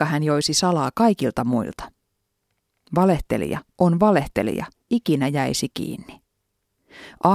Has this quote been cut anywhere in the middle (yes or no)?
yes